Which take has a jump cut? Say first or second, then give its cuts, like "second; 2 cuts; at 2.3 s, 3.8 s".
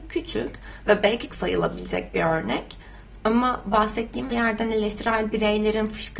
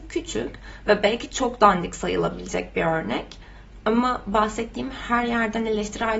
first; 2 cuts; at 1.3 s, 4.3 s